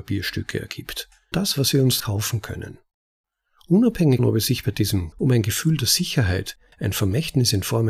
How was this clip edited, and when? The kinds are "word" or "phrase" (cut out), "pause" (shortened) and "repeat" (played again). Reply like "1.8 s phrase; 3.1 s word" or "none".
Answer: 1.3 s word; 2.0 s word; 4.2 s word; 5.1 s word